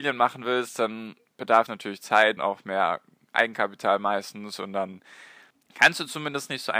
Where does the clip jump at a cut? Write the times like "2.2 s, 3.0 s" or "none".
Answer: 1.7 s, 2.4 s